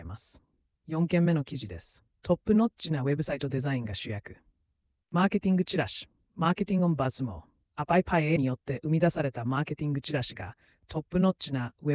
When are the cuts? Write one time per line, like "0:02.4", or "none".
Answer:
0:08.4